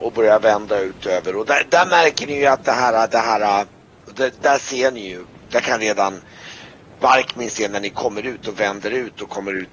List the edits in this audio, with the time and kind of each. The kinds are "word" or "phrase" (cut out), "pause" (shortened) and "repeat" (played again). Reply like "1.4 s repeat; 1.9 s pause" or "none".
none